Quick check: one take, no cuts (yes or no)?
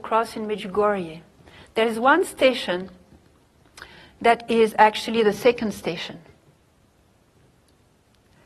yes